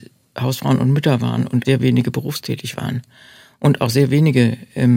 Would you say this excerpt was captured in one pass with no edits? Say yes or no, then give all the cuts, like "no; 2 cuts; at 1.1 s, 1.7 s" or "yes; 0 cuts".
no; 1 cut; at 1.6 s